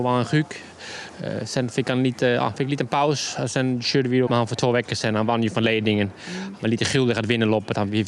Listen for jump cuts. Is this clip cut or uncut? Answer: cut